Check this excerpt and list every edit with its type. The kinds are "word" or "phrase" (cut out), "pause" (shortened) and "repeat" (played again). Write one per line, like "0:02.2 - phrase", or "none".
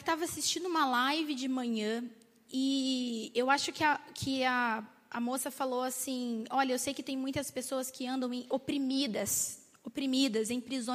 none